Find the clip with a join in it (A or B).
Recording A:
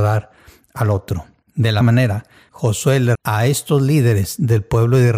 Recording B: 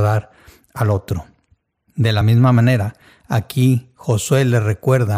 A